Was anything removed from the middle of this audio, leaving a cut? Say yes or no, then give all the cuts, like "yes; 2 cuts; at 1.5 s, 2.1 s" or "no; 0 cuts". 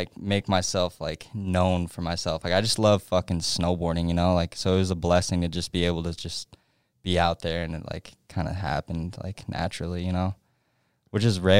no; 0 cuts